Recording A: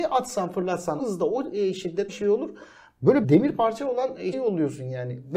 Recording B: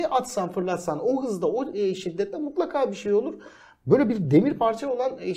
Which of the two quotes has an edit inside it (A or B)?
A